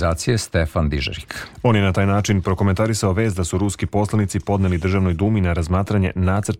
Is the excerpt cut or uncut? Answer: uncut